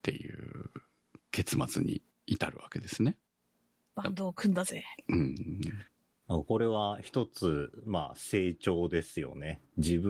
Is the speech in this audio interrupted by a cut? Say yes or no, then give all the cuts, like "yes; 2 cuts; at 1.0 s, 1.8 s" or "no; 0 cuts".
no; 0 cuts